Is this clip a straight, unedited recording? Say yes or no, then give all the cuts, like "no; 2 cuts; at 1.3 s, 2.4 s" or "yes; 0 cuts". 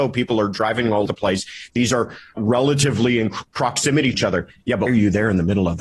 no; 5 cuts; at 1.1 s, 2.4 s, 3.5 s, 4.1 s, 4.9 s